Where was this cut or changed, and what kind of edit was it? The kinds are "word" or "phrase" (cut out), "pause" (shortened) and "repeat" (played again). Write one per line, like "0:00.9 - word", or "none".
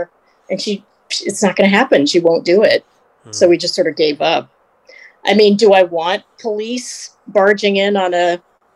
none